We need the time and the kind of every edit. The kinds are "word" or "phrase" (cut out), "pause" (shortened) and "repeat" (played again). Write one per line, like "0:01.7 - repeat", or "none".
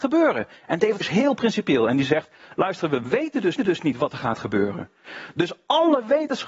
0:01.0 - word
0:03.6 - repeat